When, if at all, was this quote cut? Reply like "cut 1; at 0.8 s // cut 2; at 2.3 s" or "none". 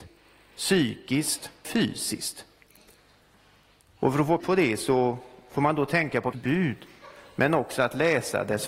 cut 1; at 1.6 s // cut 2; at 4.4 s // cut 3; at 6.3 s

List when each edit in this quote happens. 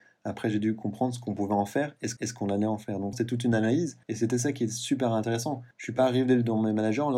cut 1; at 2.2 s // cut 2; at 3.1 s // cut 3; at 4.0 s // cut 4; at 5.7 s

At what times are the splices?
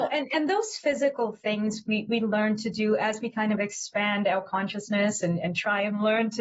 none

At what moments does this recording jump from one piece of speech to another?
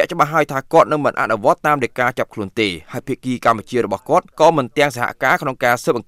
cut 1; at 4.3 s

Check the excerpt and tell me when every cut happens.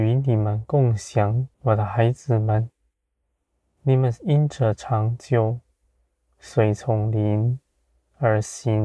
cut 1; at 1.5 s

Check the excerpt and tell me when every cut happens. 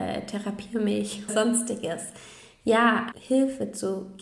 cut 1; at 1.3 s // cut 2; at 3.1 s

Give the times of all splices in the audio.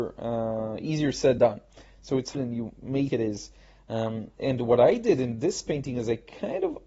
cut 1; at 1.4 s // cut 2; at 2.3 s // cut 3; at 3.1 s

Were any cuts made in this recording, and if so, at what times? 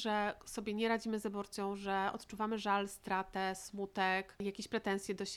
none

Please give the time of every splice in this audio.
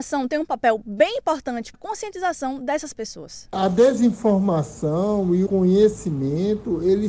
cut 1; at 1.7 s // cut 2; at 5.5 s

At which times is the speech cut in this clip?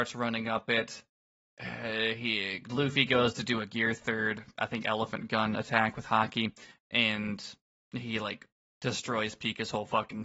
none

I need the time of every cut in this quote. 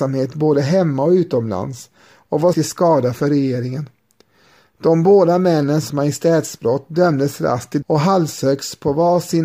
cut 1; at 2.5 s // cut 2; at 5.9 s // cut 3; at 7.8 s

